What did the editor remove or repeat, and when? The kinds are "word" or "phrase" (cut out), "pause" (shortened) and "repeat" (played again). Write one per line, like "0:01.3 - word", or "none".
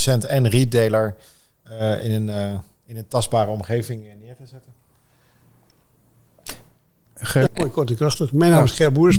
0:02.0 - word
0:07.5 - word

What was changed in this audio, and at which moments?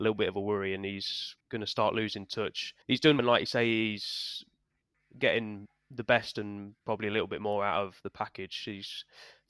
0:01.4 - pause
0:02.8 - pause
0:03.2 - word
0:04.9 - pause
0:08.0 - pause

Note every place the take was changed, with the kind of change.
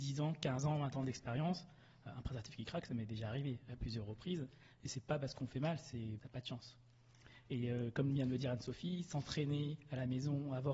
0:06.2 - phrase

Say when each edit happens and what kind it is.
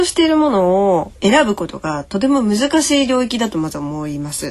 0:01.2 - pause

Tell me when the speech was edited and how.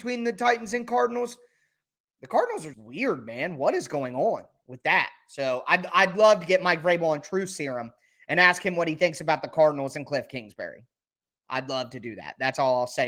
0:02.7 - word

